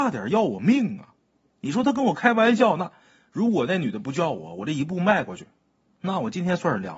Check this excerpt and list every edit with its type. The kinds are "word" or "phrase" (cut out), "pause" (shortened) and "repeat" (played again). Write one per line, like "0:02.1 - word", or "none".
none